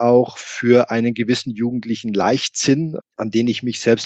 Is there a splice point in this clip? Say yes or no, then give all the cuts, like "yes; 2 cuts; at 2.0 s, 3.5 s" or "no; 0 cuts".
yes; 1 cut; at 3.0 s